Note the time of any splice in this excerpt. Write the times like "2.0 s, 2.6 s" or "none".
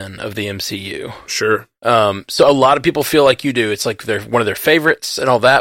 1.8 s

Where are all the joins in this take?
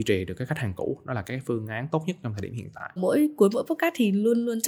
3.0 s

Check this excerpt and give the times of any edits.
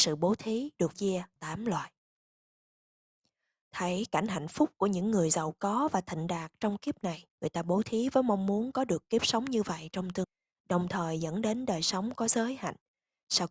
0.9 s, 1.4 s, 7.3 s, 10.2 s

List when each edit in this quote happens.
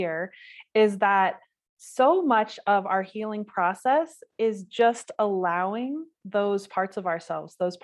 none

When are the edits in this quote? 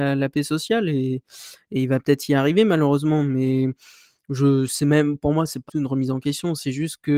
5.7 s

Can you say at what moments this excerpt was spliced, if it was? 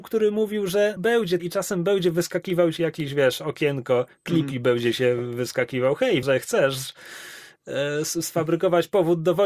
1.0 s, 1.4 s, 2.8 s, 6.2 s

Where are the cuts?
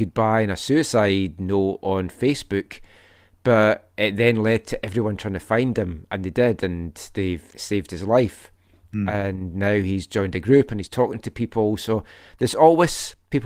7.5 s

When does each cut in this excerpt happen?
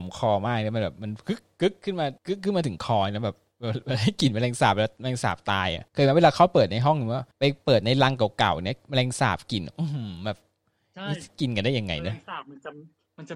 2.2 s, 5.9 s, 7.3 s

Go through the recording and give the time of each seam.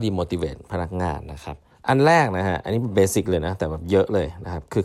1.7 s

